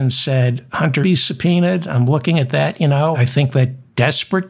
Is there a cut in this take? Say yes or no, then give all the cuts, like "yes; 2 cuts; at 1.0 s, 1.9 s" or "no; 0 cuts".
yes; 2 cuts; at 1.0 s, 3.1 s